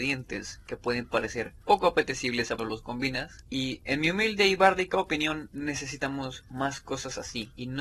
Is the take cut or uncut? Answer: cut